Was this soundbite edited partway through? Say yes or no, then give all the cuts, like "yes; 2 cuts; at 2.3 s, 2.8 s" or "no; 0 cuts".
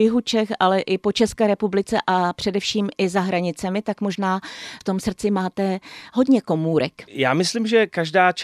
yes; 1 cut; at 7.1 s